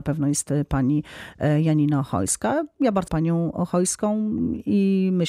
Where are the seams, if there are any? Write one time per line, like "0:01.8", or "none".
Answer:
0:03.1